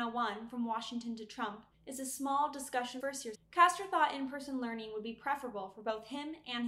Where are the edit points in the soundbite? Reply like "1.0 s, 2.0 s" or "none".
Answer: 1.7 s, 3.0 s, 3.3 s